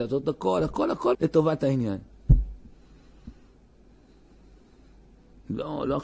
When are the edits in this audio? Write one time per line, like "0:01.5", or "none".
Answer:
0:01.1